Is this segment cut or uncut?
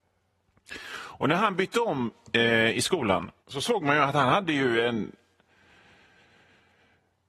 cut